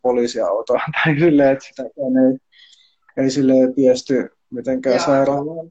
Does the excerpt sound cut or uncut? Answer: uncut